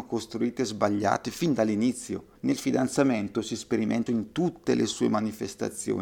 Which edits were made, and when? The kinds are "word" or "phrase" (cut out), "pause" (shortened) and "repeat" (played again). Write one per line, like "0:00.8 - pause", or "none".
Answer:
0:02.4 - pause
0:04.1 - phrase